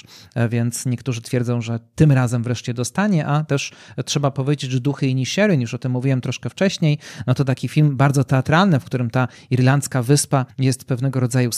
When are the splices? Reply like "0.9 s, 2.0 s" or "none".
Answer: 10.5 s